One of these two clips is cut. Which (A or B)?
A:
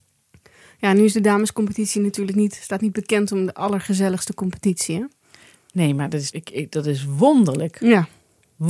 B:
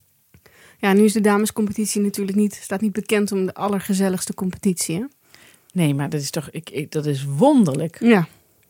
A